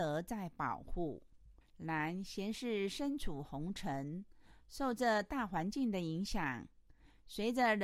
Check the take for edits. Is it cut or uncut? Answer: cut